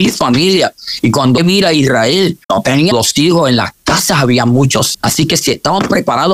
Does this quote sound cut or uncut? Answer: cut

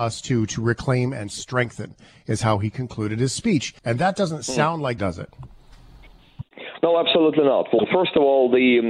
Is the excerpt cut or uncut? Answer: cut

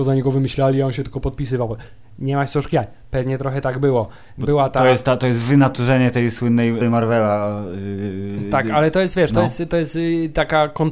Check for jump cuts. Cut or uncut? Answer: cut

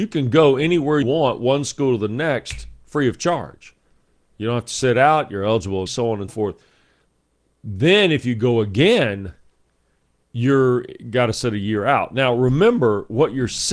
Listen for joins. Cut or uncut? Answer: cut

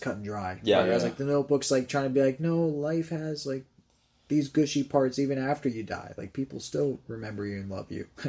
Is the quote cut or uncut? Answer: uncut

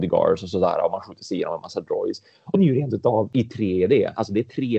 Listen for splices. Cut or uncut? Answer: cut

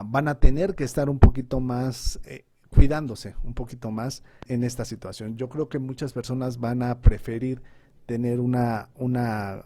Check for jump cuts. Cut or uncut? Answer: cut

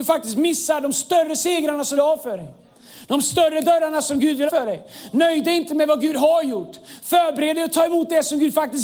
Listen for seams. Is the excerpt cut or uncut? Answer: cut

